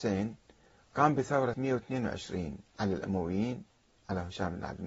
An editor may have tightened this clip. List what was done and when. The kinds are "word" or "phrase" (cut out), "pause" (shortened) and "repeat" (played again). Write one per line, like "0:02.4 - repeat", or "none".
0:01.5 - word
0:02.7 - pause